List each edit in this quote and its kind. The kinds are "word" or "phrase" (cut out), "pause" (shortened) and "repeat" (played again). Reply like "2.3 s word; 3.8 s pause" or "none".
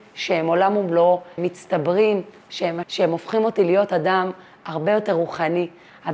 1.4 s word; 2.8 s word